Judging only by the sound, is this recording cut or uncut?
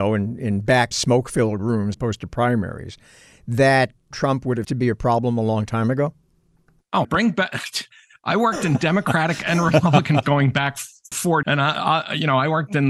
cut